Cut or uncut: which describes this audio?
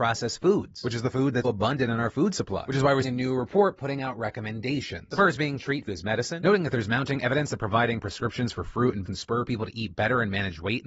cut